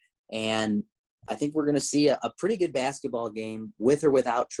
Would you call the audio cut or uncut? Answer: uncut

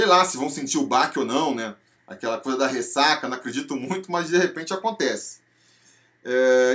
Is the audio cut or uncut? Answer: uncut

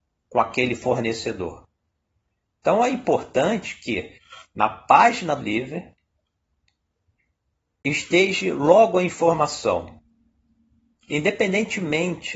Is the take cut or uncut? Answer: cut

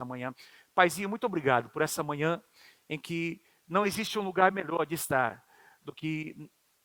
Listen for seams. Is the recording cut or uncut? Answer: uncut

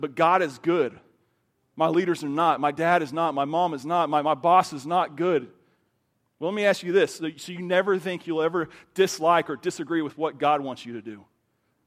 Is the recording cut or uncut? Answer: uncut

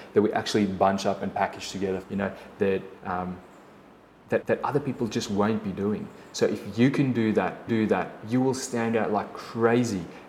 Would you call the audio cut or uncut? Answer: cut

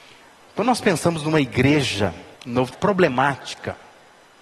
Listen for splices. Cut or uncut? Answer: cut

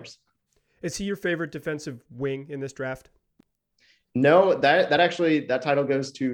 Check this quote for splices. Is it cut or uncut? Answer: uncut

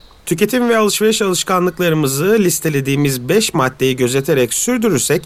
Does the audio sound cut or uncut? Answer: uncut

